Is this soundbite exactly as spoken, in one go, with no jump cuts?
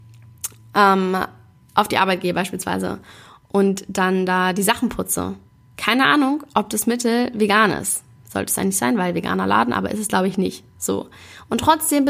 yes; 0 cuts

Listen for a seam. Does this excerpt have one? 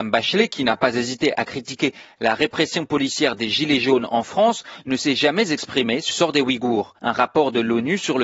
yes; 2 cuts; at 6.1 s, 7.0 s

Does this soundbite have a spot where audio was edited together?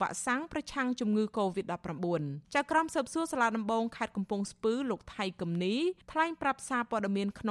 yes; 2 cuts; at 2.4 s, 6.0 s

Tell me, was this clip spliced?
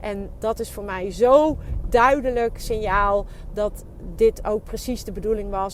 no; 0 cuts

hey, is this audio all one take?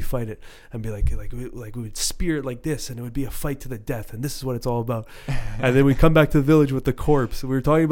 yes; 0 cuts

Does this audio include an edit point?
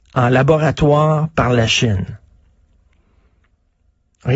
no; 0 cuts

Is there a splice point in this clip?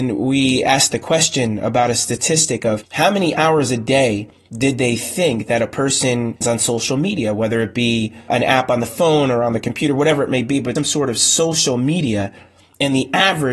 yes; 3 cuts; at 6.4 s, 8.3 s, 10.8 s

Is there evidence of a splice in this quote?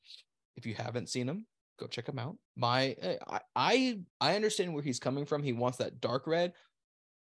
yes; 3 cuts; at 1.6 s, 2.4 s, 4.1 s

